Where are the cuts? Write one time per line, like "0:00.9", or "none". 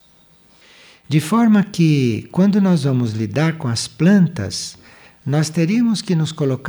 none